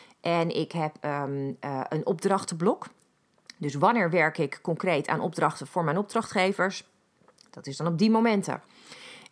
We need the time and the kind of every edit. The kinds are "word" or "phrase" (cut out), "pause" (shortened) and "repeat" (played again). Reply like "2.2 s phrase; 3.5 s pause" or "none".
none

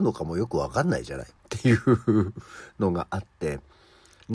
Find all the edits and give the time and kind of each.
1.4 s pause

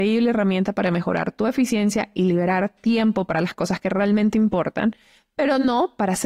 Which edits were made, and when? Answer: none

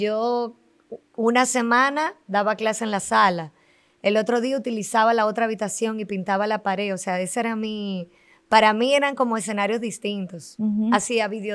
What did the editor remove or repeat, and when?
none

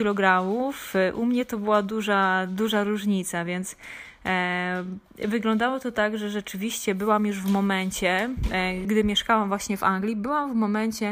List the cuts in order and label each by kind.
5.1 s pause; 8.8 s word

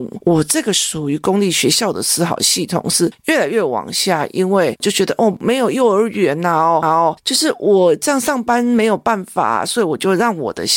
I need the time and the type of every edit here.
6.8 s repeat

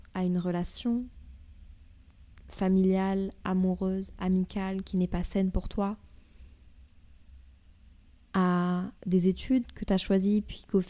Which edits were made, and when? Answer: 9.0 s pause

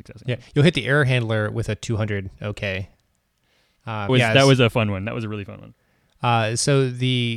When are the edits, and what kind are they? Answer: 4.1 s word

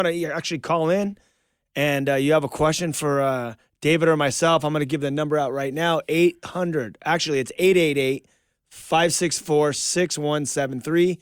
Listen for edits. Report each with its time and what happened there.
none

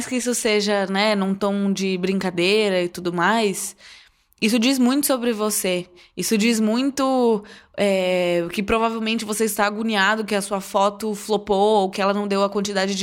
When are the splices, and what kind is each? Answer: none

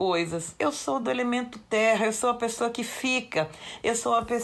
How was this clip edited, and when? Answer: none

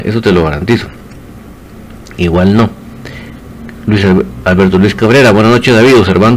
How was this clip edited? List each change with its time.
none

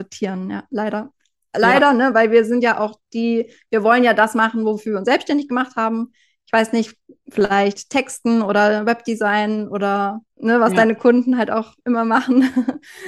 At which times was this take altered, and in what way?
10.3 s pause

